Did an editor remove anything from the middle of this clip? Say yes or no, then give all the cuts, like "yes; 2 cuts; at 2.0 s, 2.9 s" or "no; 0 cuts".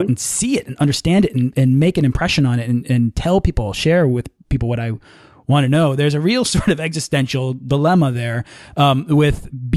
no; 0 cuts